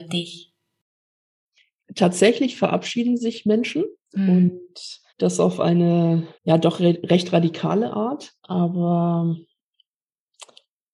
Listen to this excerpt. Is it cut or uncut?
cut